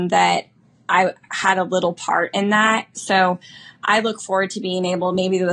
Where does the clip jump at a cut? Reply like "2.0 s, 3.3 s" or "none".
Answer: none